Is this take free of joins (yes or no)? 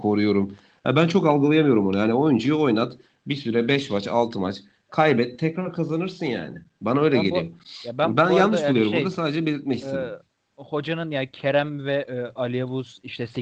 yes